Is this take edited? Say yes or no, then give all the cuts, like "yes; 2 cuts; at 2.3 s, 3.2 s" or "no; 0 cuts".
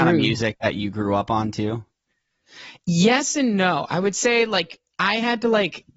no; 0 cuts